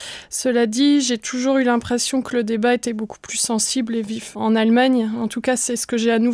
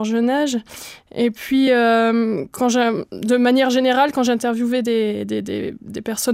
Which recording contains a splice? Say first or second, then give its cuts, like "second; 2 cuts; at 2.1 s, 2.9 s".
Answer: first; 1 cut; at 4.3 s